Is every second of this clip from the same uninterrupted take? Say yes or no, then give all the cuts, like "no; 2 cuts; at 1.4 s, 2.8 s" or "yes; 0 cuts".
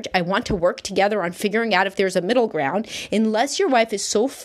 yes; 0 cuts